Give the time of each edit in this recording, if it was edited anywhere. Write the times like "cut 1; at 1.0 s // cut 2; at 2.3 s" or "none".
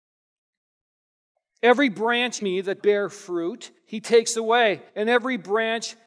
cut 1; at 2.4 s // cut 2; at 2.8 s // cut 3; at 3.8 s // cut 4; at 4.9 s